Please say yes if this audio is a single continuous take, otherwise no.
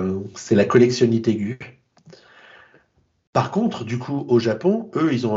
yes